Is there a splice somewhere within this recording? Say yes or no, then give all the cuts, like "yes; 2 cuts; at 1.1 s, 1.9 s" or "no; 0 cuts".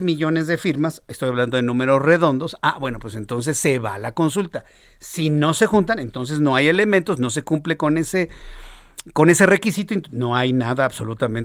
no; 0 cuts